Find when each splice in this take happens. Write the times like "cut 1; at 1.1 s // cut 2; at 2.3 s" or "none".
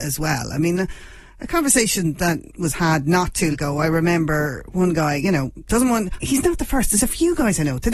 cut 1; at 3.5 s // cut 2; at 6.2 s